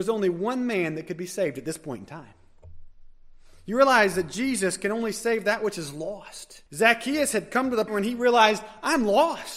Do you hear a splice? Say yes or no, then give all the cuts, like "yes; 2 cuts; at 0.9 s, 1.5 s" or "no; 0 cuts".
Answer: yes; 2 cuts; at 6.7 s, 7.9 s